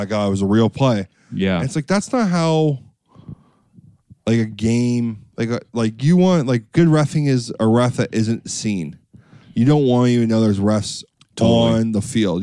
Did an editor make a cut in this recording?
no; 0 cuts

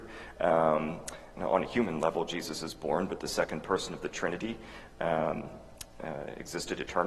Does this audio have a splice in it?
yes; 1 cut; at 1.3 s

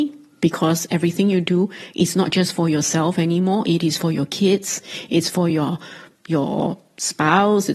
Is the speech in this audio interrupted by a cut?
no; 0 cuts

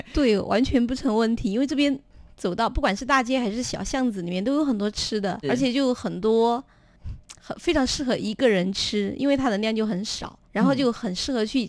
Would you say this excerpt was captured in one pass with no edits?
no; 2 cuts; at 5.4 s, 10.4 s

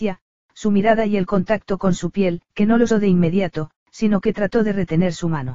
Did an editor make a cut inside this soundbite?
yes; 3 cuts; at 2.5 s, 2.9 s, 3.8 s

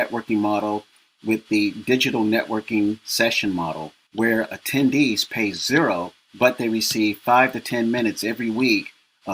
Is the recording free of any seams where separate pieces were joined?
yes; 0 cuts

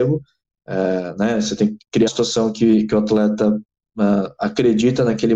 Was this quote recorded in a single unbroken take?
no; 1 cut; at 2.1 s

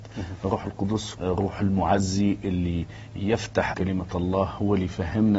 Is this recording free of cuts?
no; 2 cuts; at 1.1 s, 3.7 s

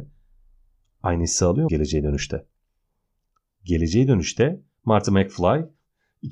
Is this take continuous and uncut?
no; 1 cut; at 1.7 s

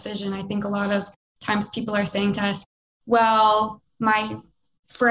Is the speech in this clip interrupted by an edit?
no; 0 cuts

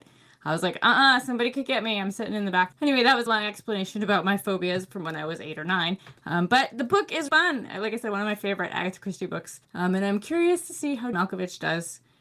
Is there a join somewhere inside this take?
yes; 5 cuts; at 2.7 s, 3.3 s, 7.3 s, 9.6 s, 11.1 s

